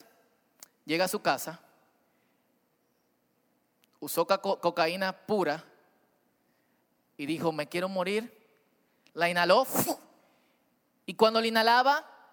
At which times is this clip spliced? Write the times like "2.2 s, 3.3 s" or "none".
none